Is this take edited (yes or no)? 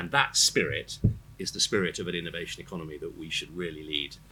no